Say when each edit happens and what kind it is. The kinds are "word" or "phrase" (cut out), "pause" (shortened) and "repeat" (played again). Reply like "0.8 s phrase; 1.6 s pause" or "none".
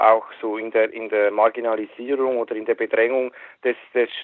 1.3 s word